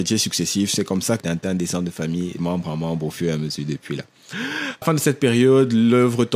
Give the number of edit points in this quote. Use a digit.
3